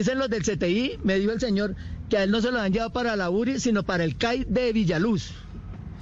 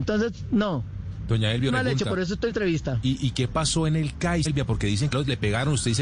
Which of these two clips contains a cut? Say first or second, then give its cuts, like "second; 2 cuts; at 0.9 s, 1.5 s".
second; 4 cuts; at 1.7 s, 2.5 s, 4.4 s, 5.1 s